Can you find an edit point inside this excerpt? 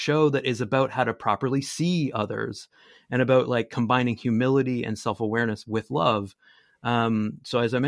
no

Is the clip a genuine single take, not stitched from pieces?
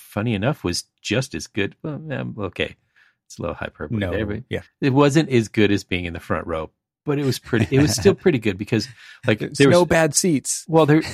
yes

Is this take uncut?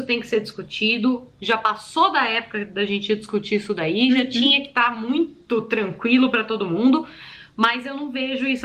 yes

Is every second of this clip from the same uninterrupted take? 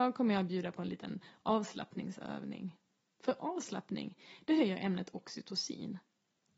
yes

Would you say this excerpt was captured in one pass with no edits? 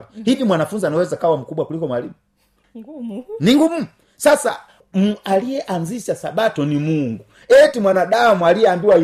yes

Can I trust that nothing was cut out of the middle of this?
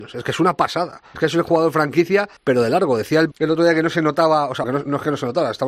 no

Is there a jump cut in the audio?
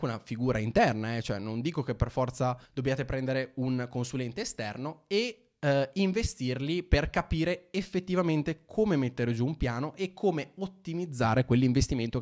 yes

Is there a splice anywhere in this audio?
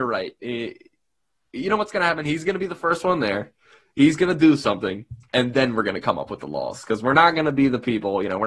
no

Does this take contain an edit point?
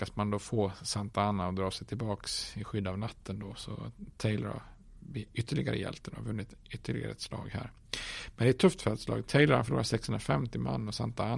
no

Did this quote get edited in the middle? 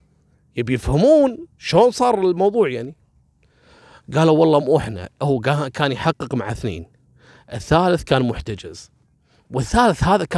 no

